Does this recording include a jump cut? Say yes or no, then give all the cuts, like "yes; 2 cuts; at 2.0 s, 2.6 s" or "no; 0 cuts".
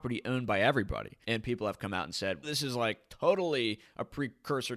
yes; 2 cuts; at 1.2 s, 2.4 s